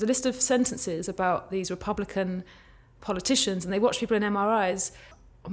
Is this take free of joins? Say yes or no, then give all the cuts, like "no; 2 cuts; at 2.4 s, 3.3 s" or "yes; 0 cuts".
yes; 0 cuts